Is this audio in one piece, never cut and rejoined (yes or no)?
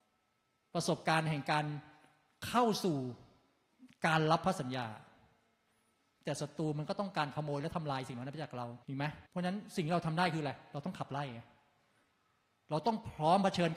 no